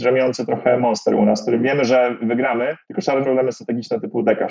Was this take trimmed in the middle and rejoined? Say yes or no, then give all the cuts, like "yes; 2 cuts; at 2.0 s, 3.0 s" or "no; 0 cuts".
yes; 2 cuts; at 2.8 s, 3.2 s